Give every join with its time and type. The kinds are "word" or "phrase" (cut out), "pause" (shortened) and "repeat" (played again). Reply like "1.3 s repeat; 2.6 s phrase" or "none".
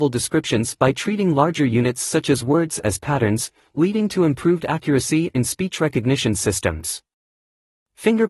5.3 s phrase